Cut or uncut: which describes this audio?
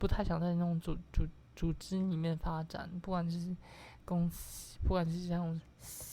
uncut